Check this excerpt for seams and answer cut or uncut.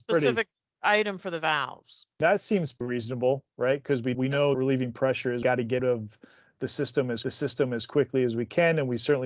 cut